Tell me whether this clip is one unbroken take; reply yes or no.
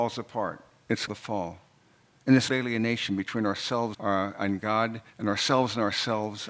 no